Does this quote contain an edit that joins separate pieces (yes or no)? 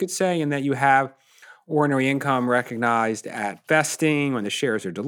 no